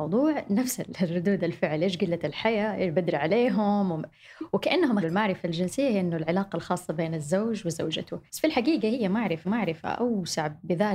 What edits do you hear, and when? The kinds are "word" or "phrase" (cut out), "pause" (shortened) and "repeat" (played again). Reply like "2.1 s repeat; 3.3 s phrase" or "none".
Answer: 5.0 s word; 8.3 s pause; 9.4 s repeat